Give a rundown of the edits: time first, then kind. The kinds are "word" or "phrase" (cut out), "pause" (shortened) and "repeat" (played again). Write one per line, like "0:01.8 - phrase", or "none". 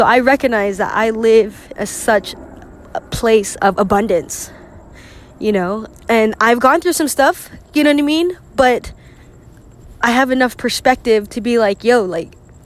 0:01.8 - word
0:03.6 - word
0:05.9 - phrase